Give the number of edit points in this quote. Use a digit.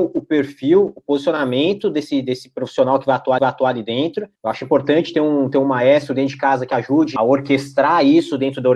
3